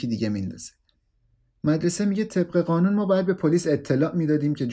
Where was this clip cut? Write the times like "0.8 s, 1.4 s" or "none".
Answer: none

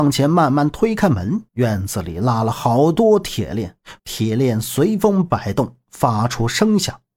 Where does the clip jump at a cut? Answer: 1.5 s, 4.0 s

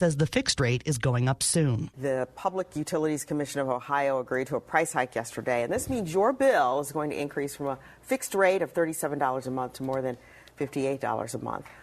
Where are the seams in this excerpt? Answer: none

